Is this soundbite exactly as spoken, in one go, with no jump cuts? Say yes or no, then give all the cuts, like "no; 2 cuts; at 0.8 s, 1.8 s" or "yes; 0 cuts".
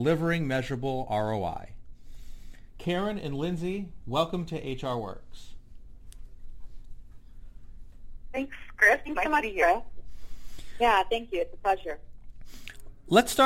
yes; 0 cuts